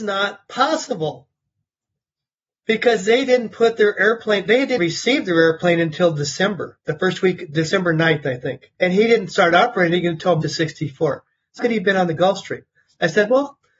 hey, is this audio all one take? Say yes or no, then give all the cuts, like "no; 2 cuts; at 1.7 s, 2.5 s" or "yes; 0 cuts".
no; 4 cuts; at 4.8 s, 8.7 s, 10.4 s, 11.6 s